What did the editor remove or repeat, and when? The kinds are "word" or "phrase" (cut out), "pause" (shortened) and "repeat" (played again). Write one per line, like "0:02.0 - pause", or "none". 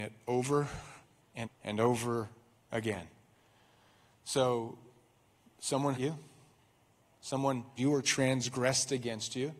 0:01.4 - word
0:05.9 - word
0:07.8 - word